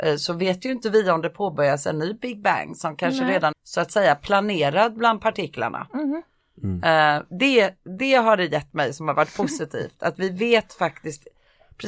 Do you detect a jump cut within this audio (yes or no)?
yes